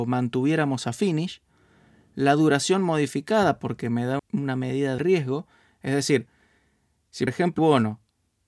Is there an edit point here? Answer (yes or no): yes